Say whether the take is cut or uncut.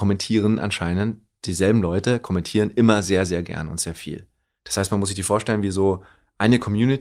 uncut